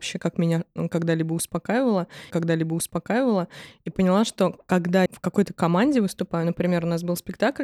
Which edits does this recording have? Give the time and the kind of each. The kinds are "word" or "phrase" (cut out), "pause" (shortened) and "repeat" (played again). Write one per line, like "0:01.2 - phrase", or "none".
0:02.3 - repeat
0:05.1 - word